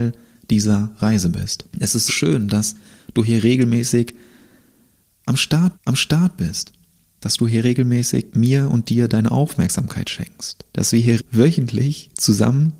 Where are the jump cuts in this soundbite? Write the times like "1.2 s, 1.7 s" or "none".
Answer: 1.7 s, 2.1 s, 5.7 s, 8.3 s, 10.7 s, 11.2 s